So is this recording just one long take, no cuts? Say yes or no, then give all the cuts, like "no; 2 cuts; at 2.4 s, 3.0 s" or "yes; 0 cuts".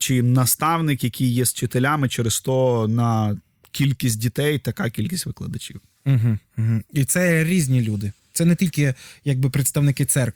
yes; 0 cuts